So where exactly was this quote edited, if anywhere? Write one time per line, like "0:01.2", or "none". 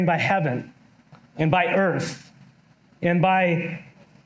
0:01.3

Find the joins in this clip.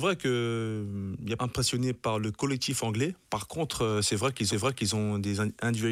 0:01.4
0:03.2
0:04.5

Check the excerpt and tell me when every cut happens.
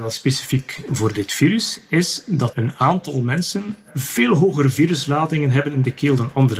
0:02.5

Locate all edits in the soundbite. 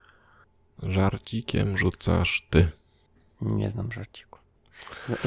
none

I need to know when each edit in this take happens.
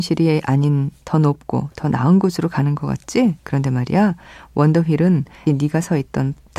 0:03.4
0:05.5

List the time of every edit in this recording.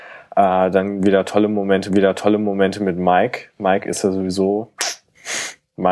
0:01.9

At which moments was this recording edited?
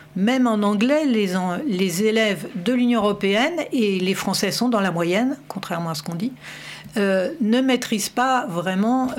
none

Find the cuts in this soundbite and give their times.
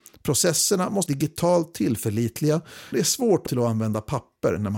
0:01.1
0:02.9
0:03.5

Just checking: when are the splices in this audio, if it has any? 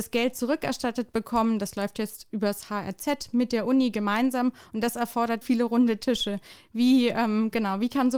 0:05.4

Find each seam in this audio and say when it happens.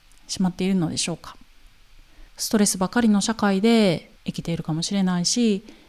0:02.3
0:04.2

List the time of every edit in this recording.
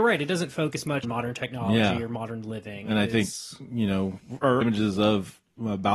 0:01.0
0:04.6

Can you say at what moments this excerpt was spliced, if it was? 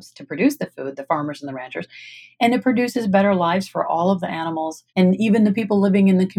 0:04.9

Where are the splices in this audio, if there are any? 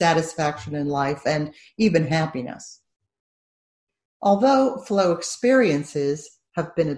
none

